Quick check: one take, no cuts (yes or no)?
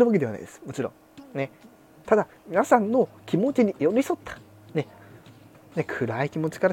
yes